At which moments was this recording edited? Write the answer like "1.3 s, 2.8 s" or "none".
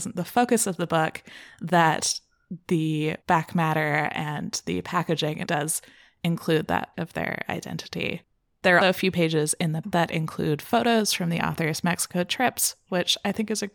3.2 s, 5.5 s, 6.9 s, 8.8 s, 9.8 s